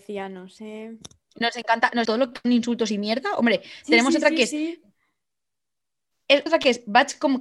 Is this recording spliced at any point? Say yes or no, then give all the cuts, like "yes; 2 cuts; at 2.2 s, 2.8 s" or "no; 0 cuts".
yes; 3 cuts; at 2.0 s, 2.4 s, 6.5 s